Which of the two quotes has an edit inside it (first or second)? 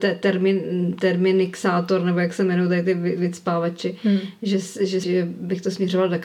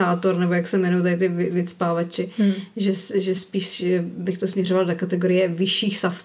first